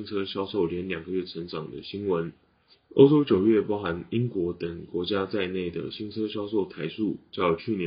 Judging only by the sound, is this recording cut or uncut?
cut